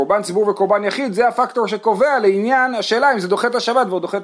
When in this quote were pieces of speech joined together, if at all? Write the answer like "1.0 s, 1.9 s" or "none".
none